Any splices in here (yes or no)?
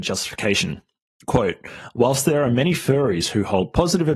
no